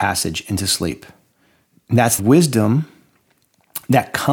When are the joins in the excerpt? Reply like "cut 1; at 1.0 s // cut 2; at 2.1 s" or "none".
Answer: cut 1; at 1.3 s // cut 2; at 2.2 s